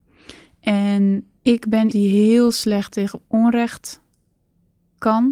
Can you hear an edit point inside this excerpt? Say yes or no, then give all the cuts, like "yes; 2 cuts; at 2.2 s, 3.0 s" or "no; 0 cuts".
yes; 2 cuts; at 1.4 s, 1.9 s